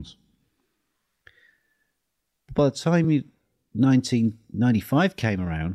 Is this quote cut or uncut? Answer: uncut